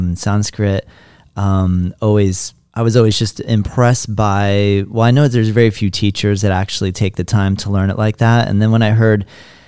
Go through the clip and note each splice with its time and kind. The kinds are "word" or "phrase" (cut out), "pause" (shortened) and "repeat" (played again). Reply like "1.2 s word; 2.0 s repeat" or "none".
none